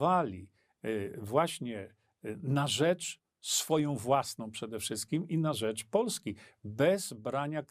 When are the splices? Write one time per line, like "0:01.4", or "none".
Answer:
none